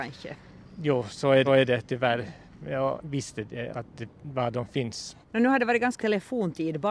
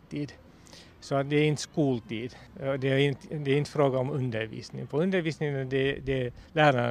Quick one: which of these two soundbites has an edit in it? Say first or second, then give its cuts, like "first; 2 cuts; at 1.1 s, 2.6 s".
first; 5 cuts; at 1.4 s, 3.0 s, 3.7 s, 5.2 s, 6.0 s